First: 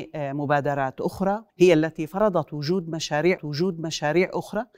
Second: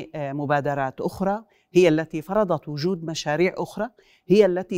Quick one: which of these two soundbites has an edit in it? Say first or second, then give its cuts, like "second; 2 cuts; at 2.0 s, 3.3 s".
first; 2 cuts; at 1.5 s, 3.4 s